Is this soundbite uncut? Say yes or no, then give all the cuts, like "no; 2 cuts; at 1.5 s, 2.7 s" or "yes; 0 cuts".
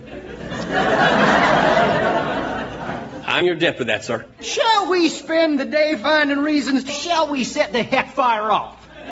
no; 3 cuts; at 3.4 s, 4.3 s, 6.9 s